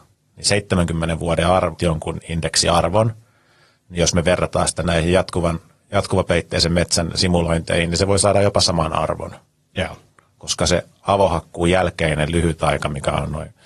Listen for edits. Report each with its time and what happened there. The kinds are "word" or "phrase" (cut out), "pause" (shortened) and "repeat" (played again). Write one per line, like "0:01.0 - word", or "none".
0:01.8 - phrase